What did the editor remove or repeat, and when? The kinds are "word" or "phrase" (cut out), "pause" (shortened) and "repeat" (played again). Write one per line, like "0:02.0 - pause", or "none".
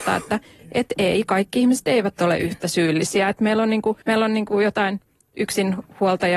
0:04.0 - pause

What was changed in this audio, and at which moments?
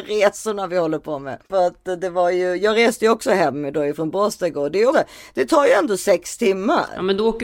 0:01.4 - pause
0:04.9 - word

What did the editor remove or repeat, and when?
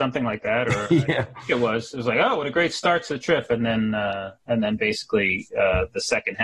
0:04.4 - pause

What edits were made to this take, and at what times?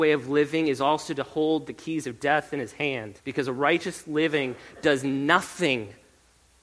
0:03.2 - pause

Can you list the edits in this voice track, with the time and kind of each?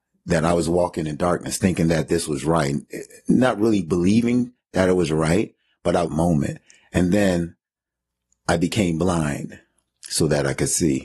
0:06.1 - phrase

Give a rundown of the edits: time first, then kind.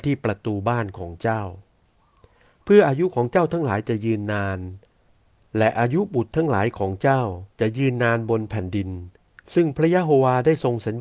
0:07.5 - pause

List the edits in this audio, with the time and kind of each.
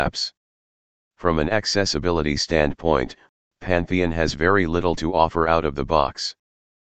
none

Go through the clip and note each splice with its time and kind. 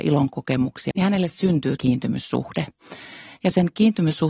0:00.9 - word
0:01.8 - word

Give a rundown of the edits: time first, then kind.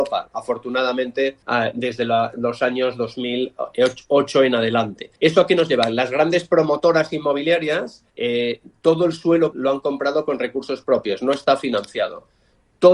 0:01.4 - pause
0:05.2 - pause
0:08.1 - pause
0:09.5 - phrase

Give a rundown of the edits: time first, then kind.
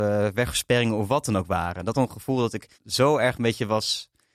0:01.9 - word
0:02.7 - pause

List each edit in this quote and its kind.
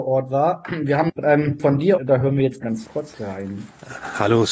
0:01.1 - word
0:01.6 - word
0:02.0 - word
0:02.6 - word

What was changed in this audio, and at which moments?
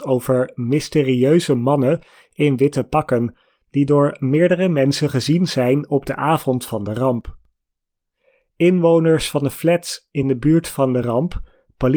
none

